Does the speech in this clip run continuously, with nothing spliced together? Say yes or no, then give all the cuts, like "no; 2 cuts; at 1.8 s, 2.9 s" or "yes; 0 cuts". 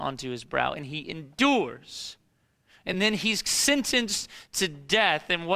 yes; 0 cuts